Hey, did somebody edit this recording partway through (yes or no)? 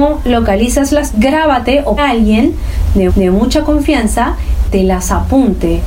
yes